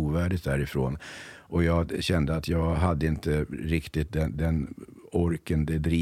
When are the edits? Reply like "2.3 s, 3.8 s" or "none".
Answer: none